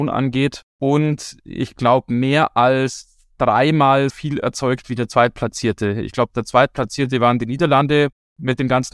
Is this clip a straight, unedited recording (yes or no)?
no